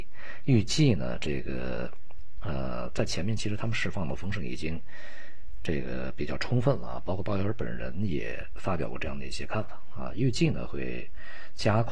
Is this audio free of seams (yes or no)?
yes